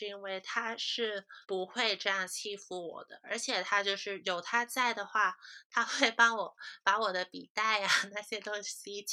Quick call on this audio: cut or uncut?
cut